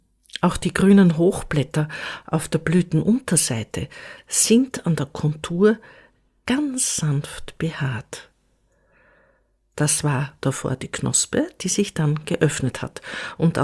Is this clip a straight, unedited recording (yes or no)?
yes